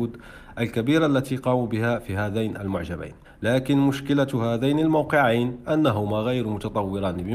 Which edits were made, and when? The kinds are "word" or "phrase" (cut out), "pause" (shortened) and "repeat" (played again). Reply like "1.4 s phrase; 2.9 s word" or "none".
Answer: 3.2 s pause